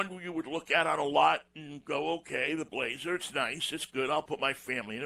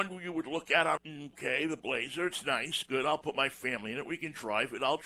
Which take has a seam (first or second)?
second